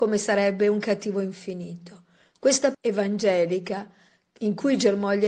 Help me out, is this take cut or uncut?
cut